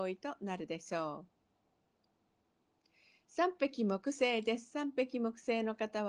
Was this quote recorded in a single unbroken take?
yes; 0 cuts

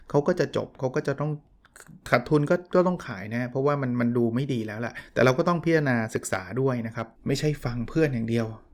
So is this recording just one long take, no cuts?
no; 1 cut; at 7.2 s

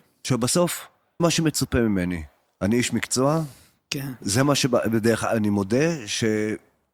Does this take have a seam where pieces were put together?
yes; 1 cut; at 1.2 s

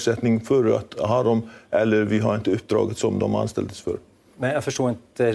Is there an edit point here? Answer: no; 0 cuts

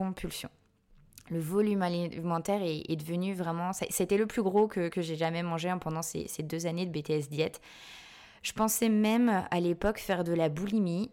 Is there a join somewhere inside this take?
no; 0 cuts

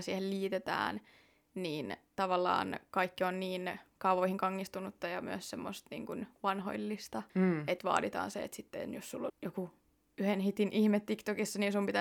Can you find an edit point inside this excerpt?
yes; 3 cuts; at 7.3 s, 7.8 s, 9.3 s

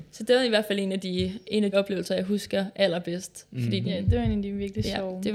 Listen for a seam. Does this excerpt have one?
yes; 1 cut; at 1.7 s

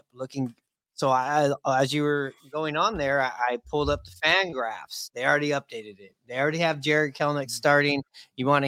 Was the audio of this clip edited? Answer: no; 0 cuts

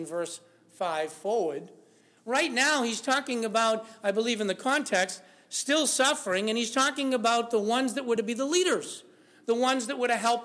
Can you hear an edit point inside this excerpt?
no; 0 cuts

